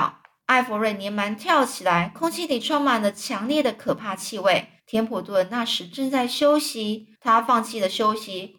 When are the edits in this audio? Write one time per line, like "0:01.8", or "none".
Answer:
0:04.8
0:07.2